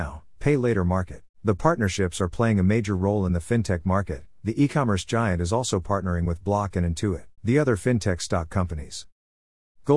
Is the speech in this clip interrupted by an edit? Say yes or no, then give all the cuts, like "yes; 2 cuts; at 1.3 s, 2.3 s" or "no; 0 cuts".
yes; 2 cuts; at 1.3 s, 7.4 s